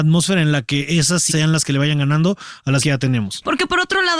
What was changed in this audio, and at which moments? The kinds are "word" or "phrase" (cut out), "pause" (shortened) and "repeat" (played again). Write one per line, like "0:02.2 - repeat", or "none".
0:01.3 - word
0:02.8 - word